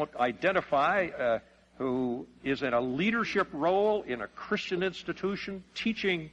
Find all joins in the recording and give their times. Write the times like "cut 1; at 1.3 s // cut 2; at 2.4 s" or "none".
none